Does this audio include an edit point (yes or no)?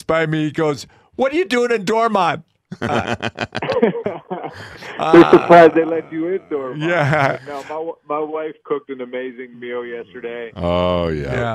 no